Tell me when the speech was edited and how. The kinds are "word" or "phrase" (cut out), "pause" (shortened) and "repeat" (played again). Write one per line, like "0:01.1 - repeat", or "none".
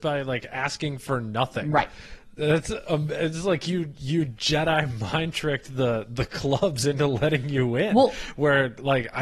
none

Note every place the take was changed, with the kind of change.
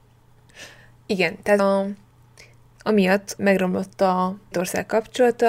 0:01.6 - word
0:03.4 - word
0:04.5 - word

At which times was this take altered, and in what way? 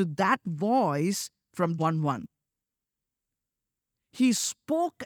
0:01.8 - word

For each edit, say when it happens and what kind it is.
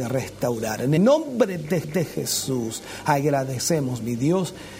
0:01.0 - word
0:01.8 - repeat

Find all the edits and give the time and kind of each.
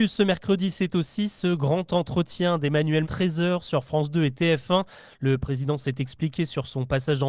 0:03.0 - phrase

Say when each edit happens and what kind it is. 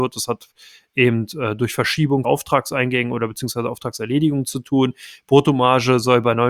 0:02.2 - word

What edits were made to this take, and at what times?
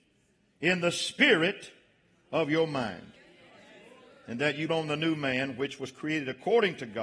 0:04.7 - word

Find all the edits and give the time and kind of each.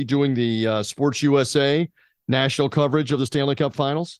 none

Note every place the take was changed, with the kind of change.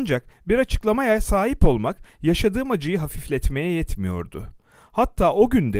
none

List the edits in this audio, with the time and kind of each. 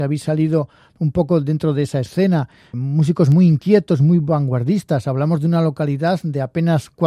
0:02.7 - word

